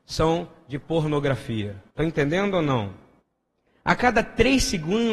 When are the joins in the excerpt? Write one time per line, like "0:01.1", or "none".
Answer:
0:01.9
0:03.2

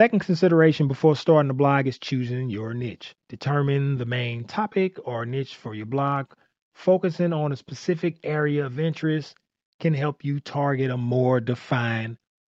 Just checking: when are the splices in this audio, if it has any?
none

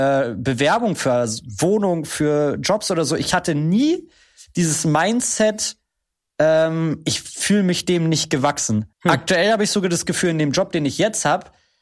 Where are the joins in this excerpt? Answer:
0:08.9

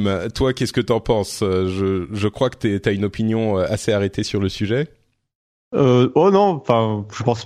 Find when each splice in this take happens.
none

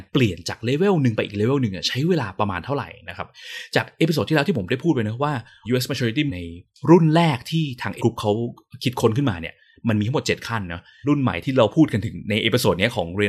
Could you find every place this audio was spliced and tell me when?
0:06.3
0:08.0

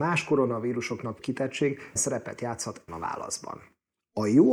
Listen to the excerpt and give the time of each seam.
0:01.2
0:02.0
0:02.9

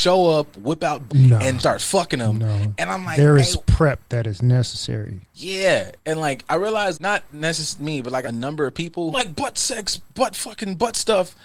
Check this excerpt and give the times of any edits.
0:01.1
0:01.6
0:06.0
0:06.9
0:07.8
0:08.2
0:09.1

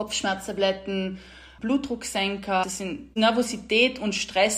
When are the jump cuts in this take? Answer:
0:02.6

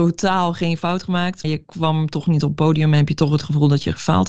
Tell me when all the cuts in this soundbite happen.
0:01.4

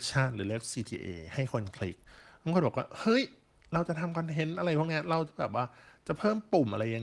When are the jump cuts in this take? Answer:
none

